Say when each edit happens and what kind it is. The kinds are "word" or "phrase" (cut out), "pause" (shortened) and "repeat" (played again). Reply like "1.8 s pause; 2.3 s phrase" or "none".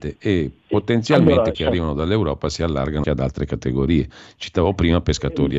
1.5 s word; 3.0 s word

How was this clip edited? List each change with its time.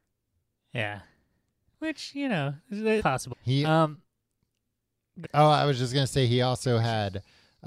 3.0 s word; 3.3 s word; 5.2 s word

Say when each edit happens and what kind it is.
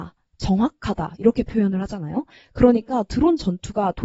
none

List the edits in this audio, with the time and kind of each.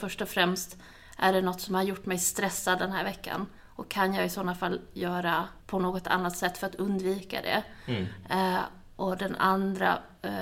3.6 s pause; 5.6 s pause

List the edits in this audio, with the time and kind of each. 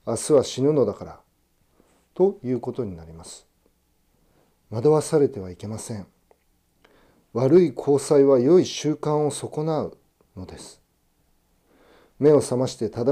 none

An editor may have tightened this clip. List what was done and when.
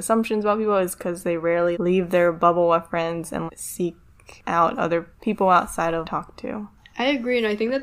1.7 s word; 3.5 s word; 6.0 s phrase

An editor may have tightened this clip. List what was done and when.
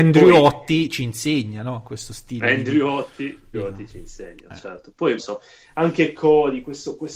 3.5 s word; 5.2 s phrase

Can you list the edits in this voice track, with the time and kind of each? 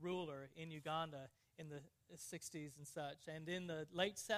none

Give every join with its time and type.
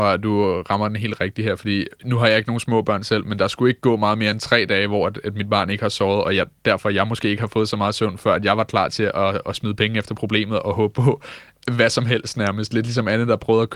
none

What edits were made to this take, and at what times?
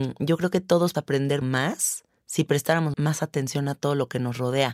0.9 s word; 1.4 s word; 2.9 s word

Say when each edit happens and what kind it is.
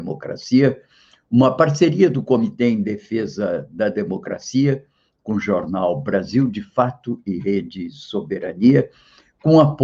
none

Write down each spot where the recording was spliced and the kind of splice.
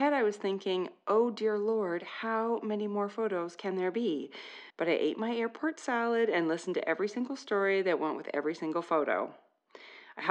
4.7 s pause

